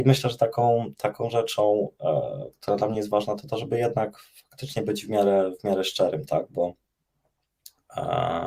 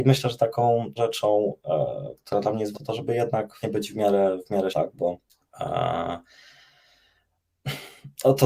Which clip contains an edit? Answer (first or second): second